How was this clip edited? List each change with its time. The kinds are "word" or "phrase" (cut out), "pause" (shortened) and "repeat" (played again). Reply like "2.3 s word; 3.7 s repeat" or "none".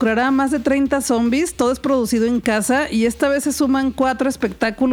none